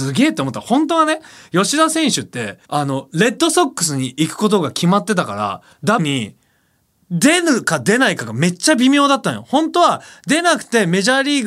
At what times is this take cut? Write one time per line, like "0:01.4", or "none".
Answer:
0:02.6
0:06.0

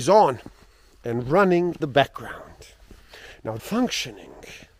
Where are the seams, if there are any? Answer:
0:01.8
0:03.6

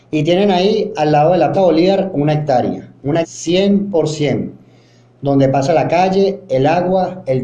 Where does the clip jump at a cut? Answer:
0:01.5
0:03.2

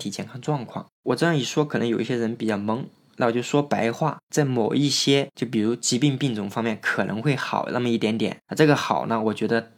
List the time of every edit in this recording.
none

